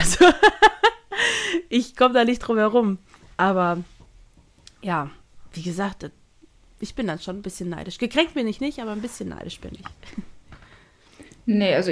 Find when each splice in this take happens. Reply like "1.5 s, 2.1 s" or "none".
none